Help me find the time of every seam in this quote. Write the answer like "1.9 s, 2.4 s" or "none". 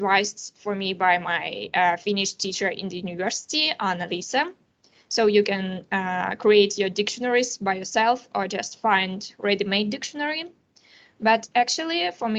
none